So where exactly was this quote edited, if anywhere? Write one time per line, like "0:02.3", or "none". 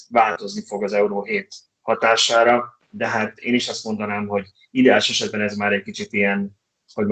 none